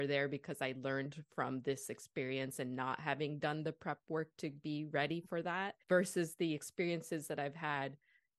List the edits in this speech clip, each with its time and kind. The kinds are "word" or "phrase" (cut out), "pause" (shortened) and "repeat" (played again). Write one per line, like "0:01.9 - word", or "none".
0:05.8 - pause